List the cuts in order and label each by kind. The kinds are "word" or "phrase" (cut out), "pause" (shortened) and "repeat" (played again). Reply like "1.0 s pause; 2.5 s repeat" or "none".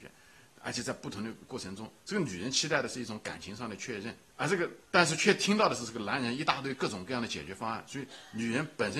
4.2 s pause; 4.8 s pause